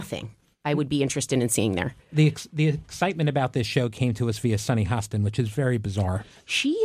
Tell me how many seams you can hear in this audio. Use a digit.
0